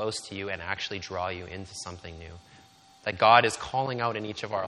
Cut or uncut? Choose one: uncut